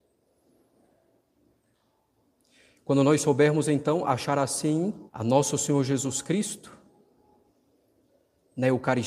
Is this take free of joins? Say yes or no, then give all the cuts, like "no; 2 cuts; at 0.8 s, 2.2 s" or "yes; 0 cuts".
no; 1 cut; at 5.1 s